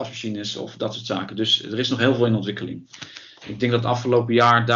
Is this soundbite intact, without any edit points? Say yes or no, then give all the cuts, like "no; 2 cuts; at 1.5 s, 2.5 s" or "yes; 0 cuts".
yes; 0 cuts